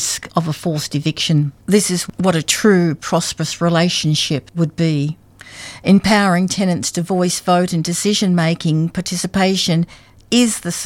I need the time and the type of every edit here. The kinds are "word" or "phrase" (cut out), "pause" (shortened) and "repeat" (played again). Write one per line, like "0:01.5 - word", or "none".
0:01.6 - pause